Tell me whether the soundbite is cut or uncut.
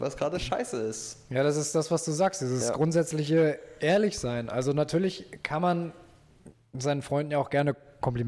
uncut